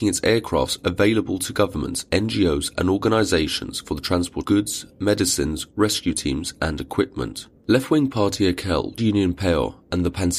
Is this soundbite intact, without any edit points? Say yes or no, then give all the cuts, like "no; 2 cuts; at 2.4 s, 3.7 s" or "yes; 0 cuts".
no; 3 cuts; at 4.4 s, 7.6 s, 9.0 s